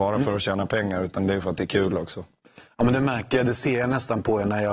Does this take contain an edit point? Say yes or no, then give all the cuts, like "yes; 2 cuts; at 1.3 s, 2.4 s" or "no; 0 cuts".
no; 0 cuts